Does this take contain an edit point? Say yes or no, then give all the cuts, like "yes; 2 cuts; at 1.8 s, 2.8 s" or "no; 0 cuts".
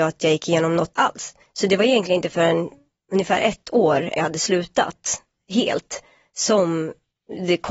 yes; 3 cuts; at 1.0 s, 1.4 s, 4.2 s